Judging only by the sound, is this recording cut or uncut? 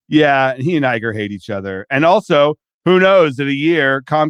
uncut